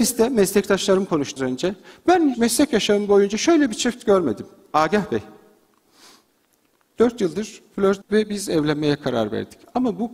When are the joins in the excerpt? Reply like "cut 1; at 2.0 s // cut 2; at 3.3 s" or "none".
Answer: cut 1; at 1.4 s // cut 2; at 2.3 s // cut 3; at 8.0 s